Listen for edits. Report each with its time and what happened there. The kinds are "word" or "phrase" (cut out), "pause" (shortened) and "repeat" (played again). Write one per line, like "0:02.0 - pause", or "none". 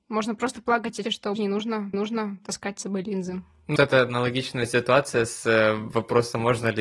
0:01.0 - word
0:01.3 - word
0:01.9 - repeat
0:03.8 - word